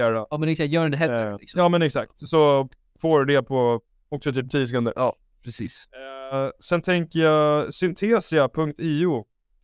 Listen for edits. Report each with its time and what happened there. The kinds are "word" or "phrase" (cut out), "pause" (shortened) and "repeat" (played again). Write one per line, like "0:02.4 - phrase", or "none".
none

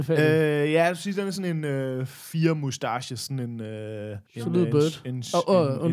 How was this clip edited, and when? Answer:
0:04.3 - pause

